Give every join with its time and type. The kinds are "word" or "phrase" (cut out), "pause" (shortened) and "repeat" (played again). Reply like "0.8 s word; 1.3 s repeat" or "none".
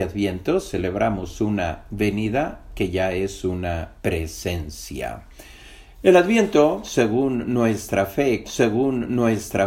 4.0 s pause; 8.4 s repeat